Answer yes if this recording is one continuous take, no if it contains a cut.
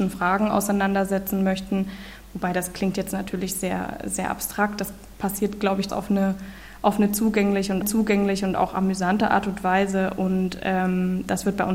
no